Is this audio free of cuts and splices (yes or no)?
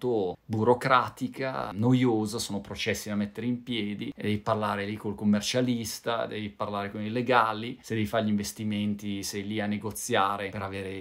yes